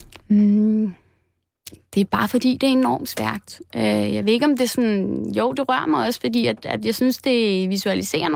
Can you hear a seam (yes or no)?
no